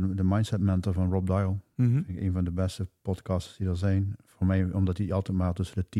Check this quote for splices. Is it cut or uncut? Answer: uncut